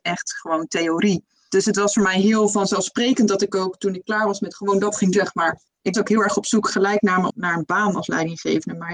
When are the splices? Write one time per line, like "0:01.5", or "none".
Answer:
0:04.5
0:05.1
0:05.9
0:07.3